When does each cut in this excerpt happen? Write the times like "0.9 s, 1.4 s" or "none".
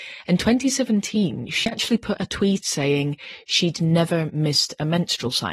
2.6 s